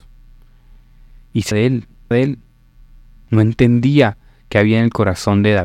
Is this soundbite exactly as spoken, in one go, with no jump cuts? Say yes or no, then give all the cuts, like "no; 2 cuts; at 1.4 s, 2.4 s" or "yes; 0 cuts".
no; 2 cuts; at 1.5 s, 2.1 s